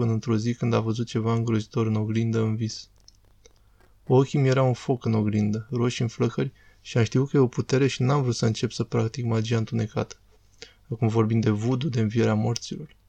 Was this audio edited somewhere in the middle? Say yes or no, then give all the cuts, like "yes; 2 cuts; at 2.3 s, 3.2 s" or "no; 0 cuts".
no; 0 cuts